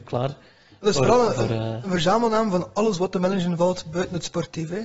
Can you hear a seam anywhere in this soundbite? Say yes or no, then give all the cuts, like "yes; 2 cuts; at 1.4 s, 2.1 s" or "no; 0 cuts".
no; 0 cuts